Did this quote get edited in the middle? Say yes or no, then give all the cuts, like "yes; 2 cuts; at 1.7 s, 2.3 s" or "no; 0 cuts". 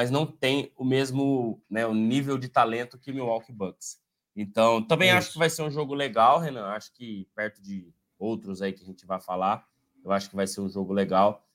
no; 0 cuts